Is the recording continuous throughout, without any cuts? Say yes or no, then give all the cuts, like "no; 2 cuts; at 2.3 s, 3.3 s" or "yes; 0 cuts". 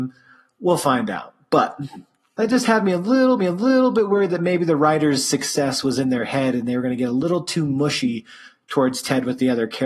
no; 1 cut; at 3.4 s